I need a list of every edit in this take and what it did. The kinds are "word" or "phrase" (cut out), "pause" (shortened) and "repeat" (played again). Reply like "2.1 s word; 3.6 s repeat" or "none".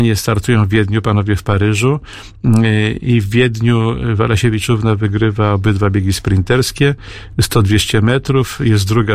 none